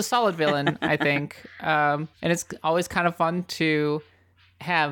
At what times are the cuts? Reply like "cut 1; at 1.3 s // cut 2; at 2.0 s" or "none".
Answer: cut 1; at 2.1 s